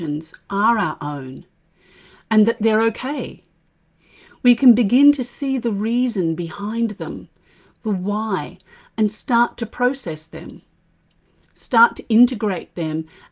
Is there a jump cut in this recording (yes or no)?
yes